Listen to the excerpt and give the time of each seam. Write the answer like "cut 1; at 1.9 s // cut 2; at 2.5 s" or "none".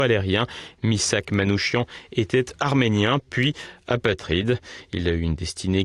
none